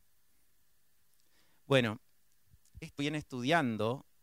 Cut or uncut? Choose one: cut